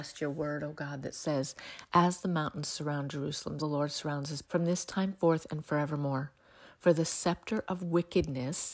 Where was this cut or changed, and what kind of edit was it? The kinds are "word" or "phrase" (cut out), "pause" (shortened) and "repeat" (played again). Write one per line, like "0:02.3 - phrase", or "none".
0:03.6 - word
0:04.4 - word